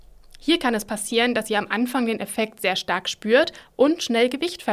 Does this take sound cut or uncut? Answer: uncut